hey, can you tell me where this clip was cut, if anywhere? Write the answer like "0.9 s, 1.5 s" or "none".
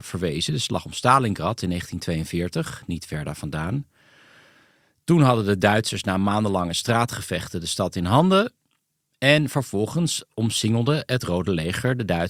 none